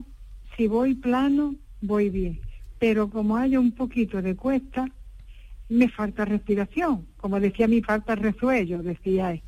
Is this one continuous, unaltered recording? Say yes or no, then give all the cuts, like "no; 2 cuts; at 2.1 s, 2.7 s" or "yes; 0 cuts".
no; 2 cuts; at 5.7 s, 7.8 s